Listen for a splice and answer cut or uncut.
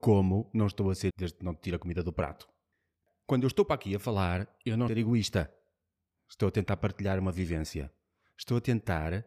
cut